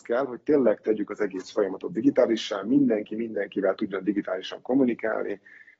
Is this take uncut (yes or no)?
yes